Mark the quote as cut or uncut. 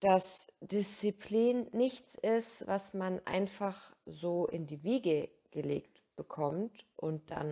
uncut